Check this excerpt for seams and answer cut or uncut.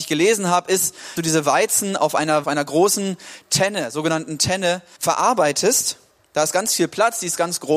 cut